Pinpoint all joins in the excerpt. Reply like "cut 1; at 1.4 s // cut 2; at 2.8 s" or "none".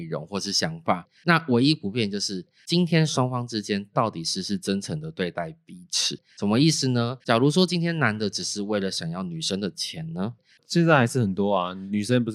cut 1; at 7.2 s